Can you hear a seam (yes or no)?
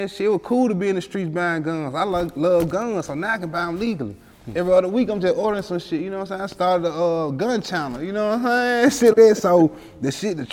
yes